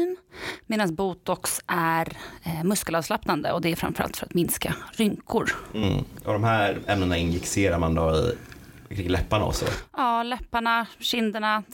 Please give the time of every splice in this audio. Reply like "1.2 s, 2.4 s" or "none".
none